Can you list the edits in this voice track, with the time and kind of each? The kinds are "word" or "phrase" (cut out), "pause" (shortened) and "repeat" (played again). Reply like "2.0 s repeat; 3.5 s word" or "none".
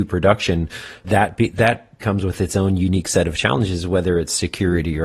1.0 s word; 2.0 s word